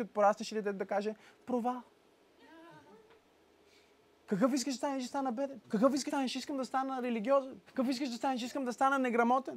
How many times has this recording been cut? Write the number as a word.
four